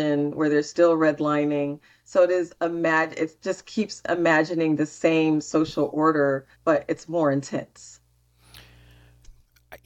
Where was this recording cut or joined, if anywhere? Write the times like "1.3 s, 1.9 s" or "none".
6.5 s